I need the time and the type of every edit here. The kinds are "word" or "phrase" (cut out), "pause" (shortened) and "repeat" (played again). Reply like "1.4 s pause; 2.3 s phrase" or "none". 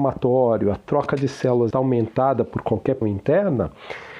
1.7 s word; 3.0 s word